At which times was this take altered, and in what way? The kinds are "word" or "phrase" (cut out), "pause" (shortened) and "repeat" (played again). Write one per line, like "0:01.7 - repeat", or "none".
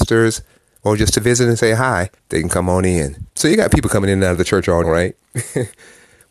0:02.2 - pause
0:03.3 - pause
0:04.8 - phrase